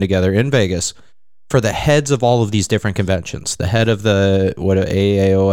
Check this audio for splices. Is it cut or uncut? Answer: uncut